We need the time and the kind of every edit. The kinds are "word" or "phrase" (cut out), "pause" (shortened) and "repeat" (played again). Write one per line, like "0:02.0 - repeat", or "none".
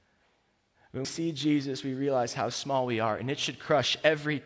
0:01.0 - word